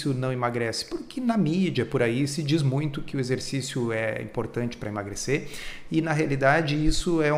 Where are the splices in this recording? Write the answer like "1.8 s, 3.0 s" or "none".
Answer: none